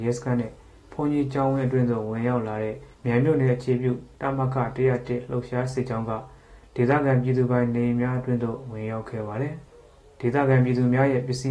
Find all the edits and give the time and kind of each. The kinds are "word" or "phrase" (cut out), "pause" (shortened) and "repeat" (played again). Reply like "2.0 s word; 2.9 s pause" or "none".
2.9 s pause; 9.7 s pause